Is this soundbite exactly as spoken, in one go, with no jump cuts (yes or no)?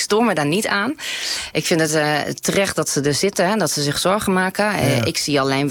yes